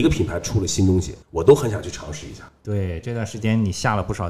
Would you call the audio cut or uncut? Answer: cut